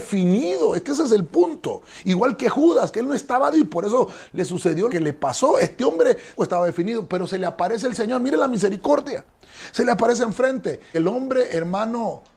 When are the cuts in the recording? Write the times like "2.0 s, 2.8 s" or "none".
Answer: 3.5 s, 4.9 s, 6.4 s, 10.9 s